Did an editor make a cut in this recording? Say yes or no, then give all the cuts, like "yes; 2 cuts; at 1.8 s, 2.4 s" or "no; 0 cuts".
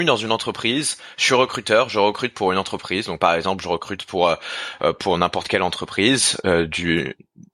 no; 0 cuts